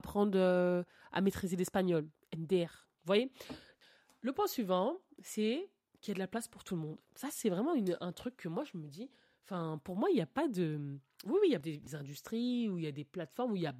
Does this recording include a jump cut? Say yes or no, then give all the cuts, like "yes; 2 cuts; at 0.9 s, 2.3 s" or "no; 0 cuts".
no; 0 cuts